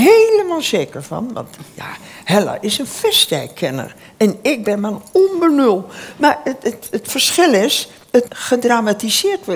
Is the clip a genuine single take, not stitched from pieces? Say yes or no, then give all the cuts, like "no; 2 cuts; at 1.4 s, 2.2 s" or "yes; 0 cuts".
no; 1 cut; at 8.3 s